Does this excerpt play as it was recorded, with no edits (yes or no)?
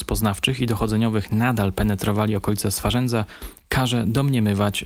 yes